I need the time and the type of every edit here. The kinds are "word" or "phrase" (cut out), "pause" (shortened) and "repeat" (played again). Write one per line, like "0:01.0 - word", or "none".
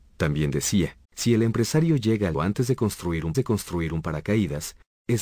0:01.0 - pause
0:02.3 - word
0:03.3 - repeat